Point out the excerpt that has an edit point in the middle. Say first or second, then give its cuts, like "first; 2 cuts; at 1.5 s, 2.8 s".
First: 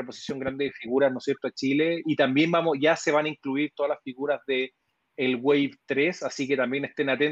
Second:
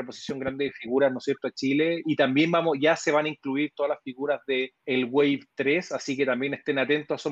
second; 1 cut; at 4.8 s